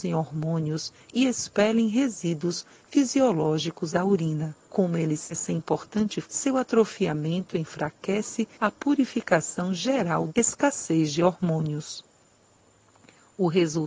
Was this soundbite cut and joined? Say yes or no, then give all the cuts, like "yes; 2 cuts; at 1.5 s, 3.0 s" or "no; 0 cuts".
yes; 6 cuts; at 3.9 s, 4.6 s, 5.3 s, 6.2 s, 8.5 s, 10.3 s